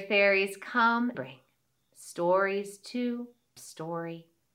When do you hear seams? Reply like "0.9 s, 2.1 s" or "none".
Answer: 1.1 s, 3.6 s